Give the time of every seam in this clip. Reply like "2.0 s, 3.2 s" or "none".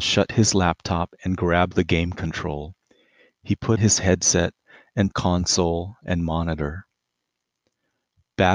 3.8 s, 5.1 s

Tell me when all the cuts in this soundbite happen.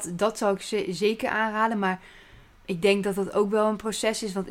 none

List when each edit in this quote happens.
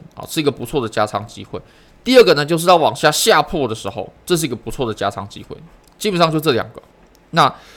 none

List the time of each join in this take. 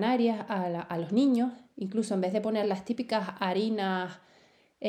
none

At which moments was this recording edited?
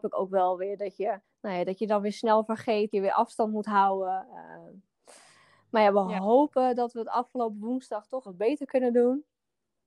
1.2 s, 2.9 s, 8.2 s

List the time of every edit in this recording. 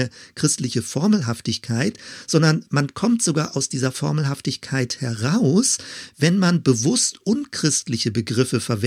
none

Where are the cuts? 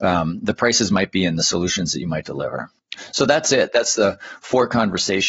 none

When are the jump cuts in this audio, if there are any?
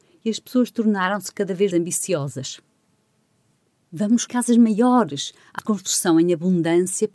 1.7 s, 4.3 s, 5.6 s

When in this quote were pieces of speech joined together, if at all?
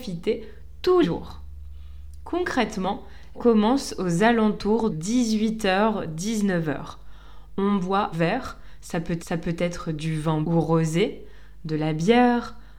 1.0 s, 3.3 s, 4.9 s, 8.1 s, 9.2 s, 10.4 s

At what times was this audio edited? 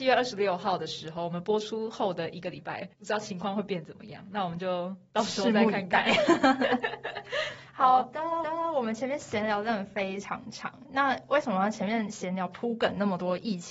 2.9 s, 8.4 s

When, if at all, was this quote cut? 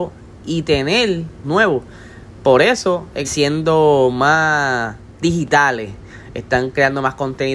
1.4 s, 3.2 s

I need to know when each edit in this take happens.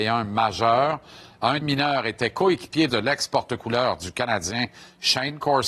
1.6 s, 2.9 s

